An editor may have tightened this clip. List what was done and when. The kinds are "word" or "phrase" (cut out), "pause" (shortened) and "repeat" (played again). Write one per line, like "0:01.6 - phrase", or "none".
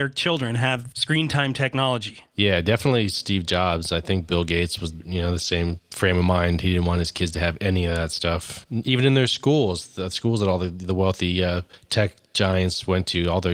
none